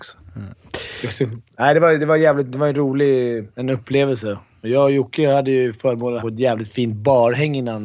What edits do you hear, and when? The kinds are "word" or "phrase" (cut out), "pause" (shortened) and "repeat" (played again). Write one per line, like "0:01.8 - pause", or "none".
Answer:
0:03.5 - pause
0:06.2 - word

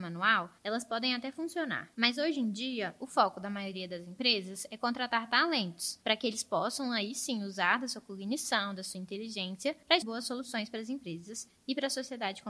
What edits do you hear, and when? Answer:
0:10.0 - phrase

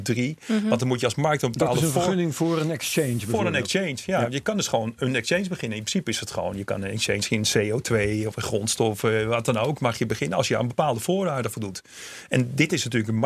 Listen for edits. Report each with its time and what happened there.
none

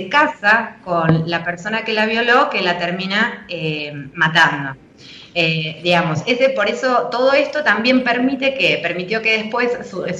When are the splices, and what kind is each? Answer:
none

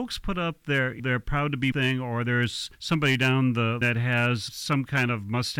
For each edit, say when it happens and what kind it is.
0:01.0 - word
0:01.7 - word
0:02.7 - pause
0:03.8 - word
0:04.5 - word

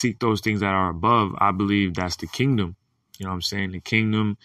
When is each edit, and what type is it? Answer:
none

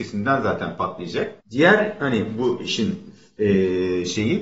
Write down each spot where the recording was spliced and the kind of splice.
0:01.4 - pause

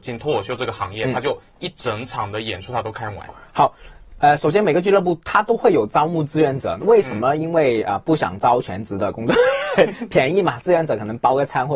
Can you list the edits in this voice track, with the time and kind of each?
none

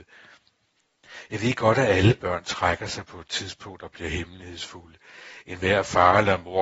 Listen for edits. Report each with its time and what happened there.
none

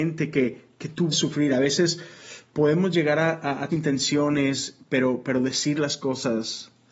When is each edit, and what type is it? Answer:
0:01.1 - word
0:03.7 - phrase

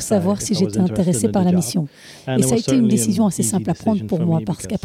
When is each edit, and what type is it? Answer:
none

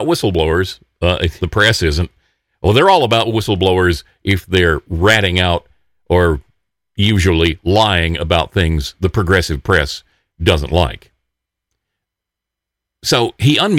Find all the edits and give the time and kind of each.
0:01.4 - word

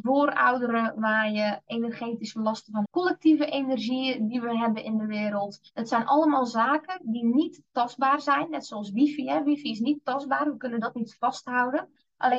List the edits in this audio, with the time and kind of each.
0:01.7 - word
0:02.8 - word
0:05.7 - pause

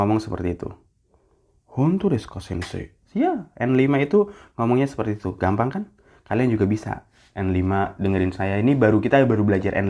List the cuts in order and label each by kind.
none

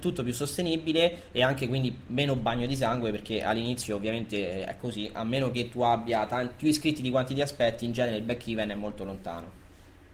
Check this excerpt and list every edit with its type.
none

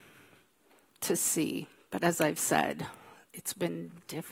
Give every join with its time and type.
none

